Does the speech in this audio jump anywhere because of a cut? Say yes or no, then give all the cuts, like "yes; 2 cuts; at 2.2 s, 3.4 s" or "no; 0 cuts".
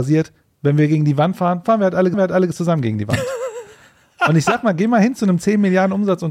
yes; 1 cut; at 2.1 s